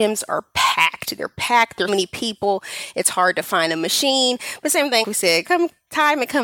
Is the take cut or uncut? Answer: cut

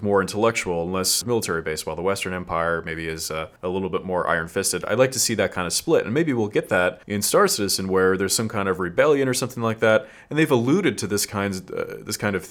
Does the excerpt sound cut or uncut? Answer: cut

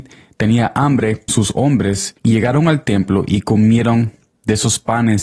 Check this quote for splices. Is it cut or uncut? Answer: cut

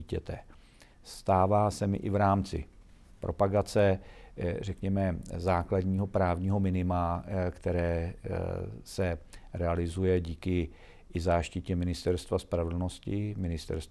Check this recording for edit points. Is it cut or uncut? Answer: uncut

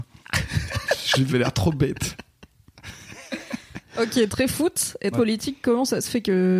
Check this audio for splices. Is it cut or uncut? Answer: cut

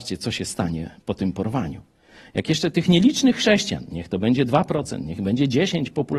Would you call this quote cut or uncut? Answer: uncut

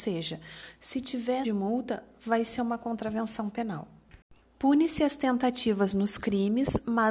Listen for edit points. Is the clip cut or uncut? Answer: cut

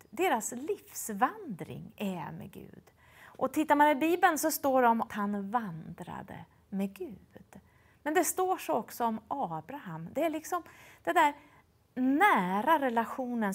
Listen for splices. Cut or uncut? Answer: cut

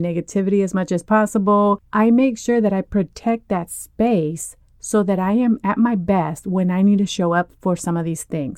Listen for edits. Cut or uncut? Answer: uncut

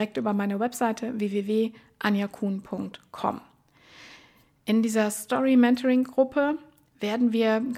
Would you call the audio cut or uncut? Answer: uncut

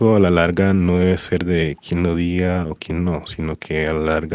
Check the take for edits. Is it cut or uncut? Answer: uncut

